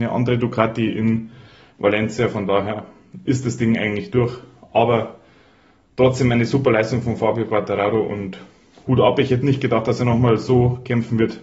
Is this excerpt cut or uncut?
uncut